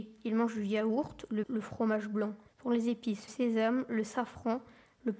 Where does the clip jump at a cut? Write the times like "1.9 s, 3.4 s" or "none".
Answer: 1.4 s, 2.5 s, 3.3 s